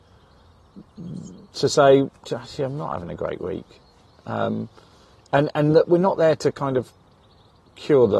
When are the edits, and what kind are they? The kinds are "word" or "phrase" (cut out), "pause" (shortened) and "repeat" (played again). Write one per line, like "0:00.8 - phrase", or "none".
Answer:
none